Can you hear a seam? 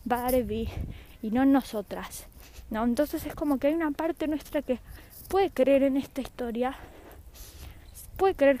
no; 0 cuts

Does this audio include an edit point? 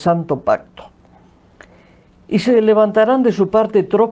no; 0 cuts

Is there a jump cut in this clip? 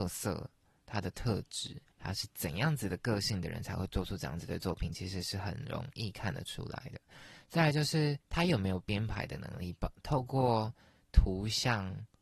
yes; 2 cuts; at 1.9 s, 8.2 s

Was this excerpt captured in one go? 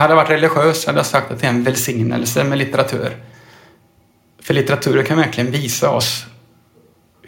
yes; 0 cuts

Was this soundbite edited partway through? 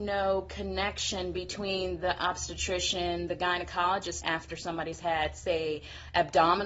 yes; 1 cut; at 4.2 s

